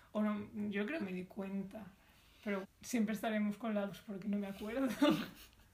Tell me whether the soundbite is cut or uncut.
cut